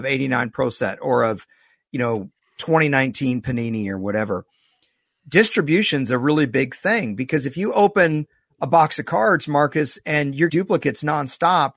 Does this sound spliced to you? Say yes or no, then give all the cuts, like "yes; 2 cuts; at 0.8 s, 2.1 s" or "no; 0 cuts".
yes; 1 cut; at 10.5 s